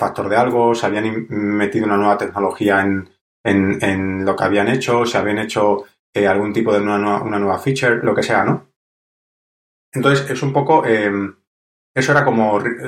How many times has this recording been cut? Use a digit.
0